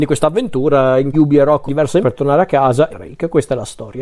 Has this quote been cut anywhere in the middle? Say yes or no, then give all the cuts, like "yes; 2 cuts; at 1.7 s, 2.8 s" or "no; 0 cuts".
yes; 4 cuts; at 1.1 s, 1.7 s, 2.0 s, 2.9 s